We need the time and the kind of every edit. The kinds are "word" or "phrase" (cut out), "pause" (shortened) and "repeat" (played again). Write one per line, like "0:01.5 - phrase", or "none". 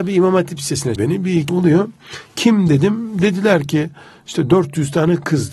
0:01.0 - word
0:01.5 - word